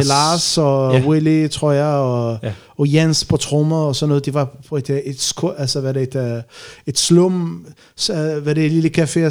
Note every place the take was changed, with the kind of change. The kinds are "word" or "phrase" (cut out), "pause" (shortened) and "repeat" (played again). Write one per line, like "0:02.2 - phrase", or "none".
none